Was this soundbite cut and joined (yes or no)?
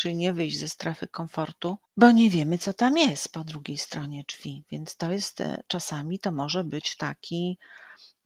yes